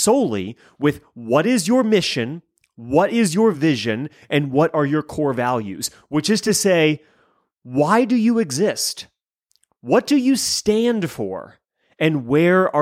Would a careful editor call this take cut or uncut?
uncut